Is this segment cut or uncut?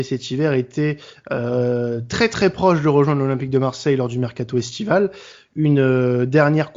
uncut